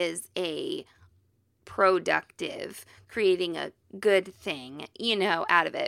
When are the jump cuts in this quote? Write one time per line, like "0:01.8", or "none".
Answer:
none